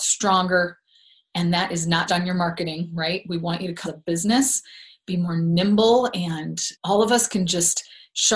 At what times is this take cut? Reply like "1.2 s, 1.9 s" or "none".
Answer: 2.1 s, 3.8 s, 6.7 s